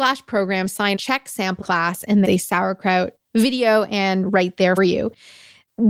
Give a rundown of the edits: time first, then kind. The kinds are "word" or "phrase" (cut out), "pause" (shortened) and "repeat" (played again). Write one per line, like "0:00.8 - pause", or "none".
0:01.0 - word
0:01.6 - word
0:02.2 - phrase
0:04.3 - word
0:04.8 - word